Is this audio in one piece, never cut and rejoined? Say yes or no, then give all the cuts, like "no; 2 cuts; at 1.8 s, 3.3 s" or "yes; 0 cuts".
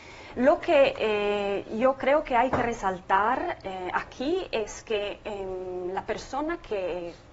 yes; 0 cuts